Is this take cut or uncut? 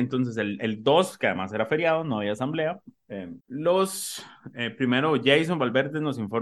cut